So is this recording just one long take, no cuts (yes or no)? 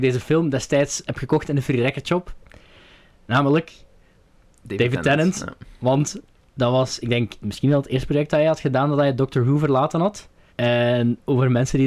no